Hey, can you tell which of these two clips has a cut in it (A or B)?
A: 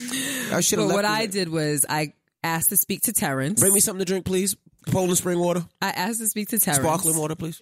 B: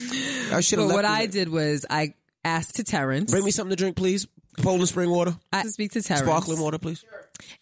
B